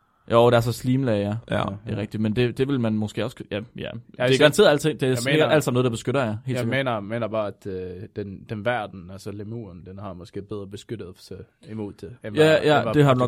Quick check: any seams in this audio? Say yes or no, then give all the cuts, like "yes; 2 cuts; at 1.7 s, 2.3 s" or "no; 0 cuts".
no; 0 cuts